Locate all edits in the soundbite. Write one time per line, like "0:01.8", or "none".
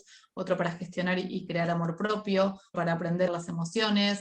0:01.5
0:02.7
0:03.3